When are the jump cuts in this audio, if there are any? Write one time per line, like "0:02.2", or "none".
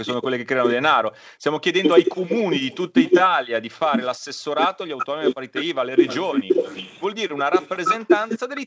none